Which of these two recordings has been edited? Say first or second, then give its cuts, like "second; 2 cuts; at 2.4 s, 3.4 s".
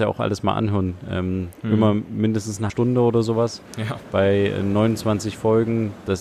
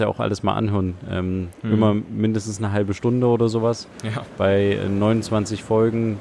first; 1 cut; at 2.7 s